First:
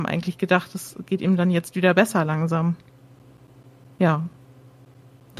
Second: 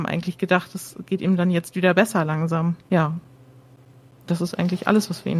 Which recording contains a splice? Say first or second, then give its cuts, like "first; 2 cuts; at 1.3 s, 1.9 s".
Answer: second; 1 cut; at 2.8 s